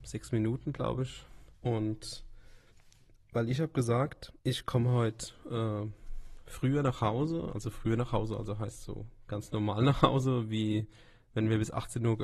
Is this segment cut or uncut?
cut